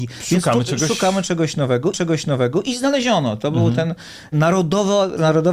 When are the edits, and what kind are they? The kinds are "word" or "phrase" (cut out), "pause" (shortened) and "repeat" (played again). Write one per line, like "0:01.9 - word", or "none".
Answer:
0:01.9 - repeat